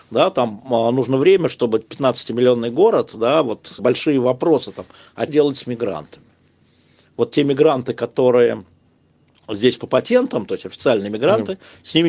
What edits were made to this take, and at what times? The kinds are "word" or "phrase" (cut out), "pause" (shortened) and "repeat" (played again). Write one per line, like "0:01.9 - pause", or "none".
0:03.8 - word
0:05.3 - word